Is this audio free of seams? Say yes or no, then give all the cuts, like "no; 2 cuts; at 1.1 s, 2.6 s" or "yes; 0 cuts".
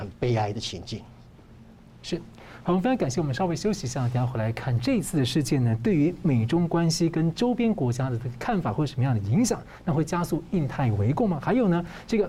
yes; 0 cuts